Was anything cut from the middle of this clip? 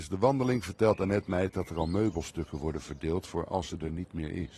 no; 0 cuts

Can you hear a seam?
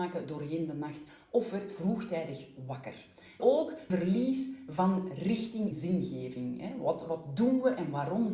yes; 3 cuts; at 3.4 s, 3.9 s, 5.7 s

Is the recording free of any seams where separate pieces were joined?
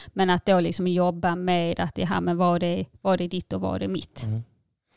yes; 0 cuts

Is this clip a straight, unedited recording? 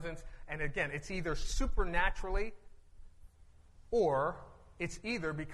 yes; 0 cuts

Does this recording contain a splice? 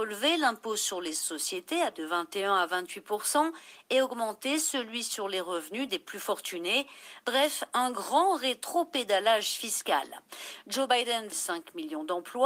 yes; 1 cut; at 11.3 s

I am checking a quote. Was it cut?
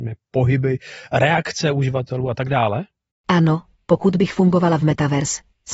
yes; 1 cut; at 3.1 s

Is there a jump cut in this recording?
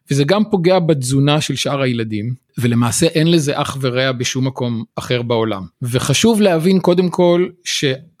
yes; 2 cuts; at 4.9 s, 5.7 s

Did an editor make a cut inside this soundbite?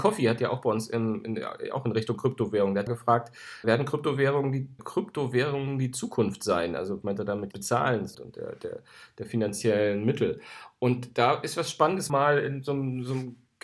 yes; 7 cuts; at 2.9 s, 3.6 s, 4.8 s, 7.0 s, 7.5 s, 8.1 s, 12.1 s

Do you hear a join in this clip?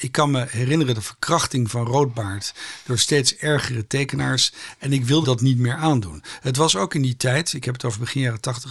yes; 1 cut; at 5.2 s

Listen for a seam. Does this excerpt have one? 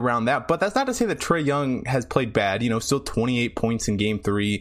no; 0 cuts

